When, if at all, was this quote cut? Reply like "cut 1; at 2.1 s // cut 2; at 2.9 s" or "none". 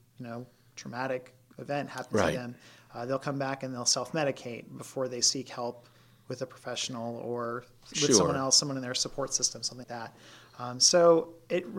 cut 1; at 9.8 s